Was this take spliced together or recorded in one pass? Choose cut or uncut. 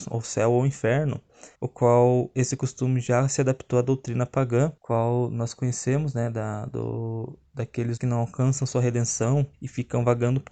cut